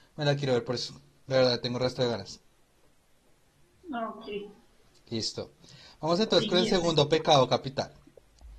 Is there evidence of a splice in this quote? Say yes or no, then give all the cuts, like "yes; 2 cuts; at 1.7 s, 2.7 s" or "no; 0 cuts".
no; 0 cuts